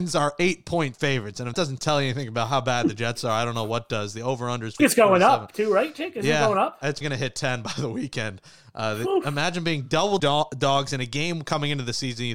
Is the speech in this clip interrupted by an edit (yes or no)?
yes